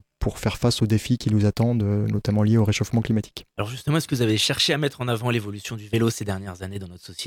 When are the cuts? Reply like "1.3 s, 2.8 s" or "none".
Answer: 3.5 s